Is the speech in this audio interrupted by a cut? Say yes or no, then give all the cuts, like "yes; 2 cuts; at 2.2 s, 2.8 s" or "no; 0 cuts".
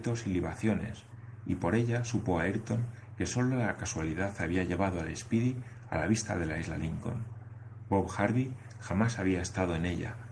no; 0 cuts